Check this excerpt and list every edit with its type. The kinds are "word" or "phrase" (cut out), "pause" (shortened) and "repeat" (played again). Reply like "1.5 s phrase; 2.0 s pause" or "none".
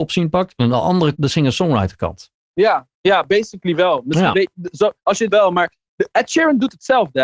1.1 s word; 4.3 s phrase; 5.0 s pause; 5.3 s phrase; 6.1 s word